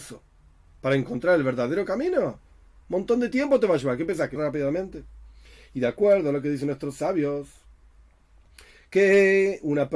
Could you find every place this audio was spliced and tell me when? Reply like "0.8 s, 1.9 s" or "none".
4.4 s